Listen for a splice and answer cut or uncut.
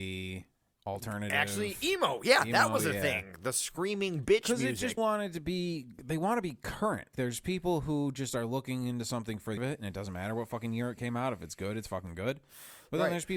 cut